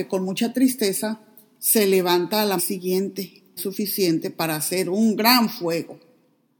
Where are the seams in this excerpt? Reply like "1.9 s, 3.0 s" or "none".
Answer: 2.6 s, 3.6 s